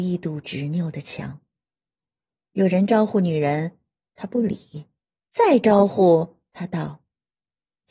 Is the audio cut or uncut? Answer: uncut